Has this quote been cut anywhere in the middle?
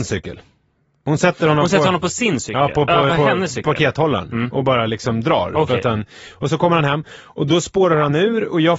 yes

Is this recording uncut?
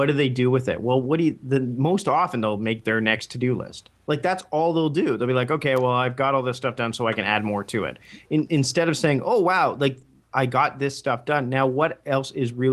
yes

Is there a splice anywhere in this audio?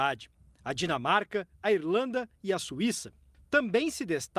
no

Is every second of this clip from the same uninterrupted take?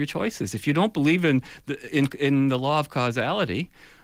yes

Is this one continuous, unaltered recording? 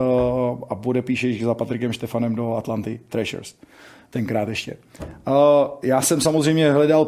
yes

